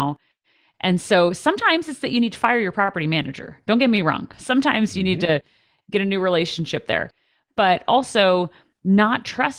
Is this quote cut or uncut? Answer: uncut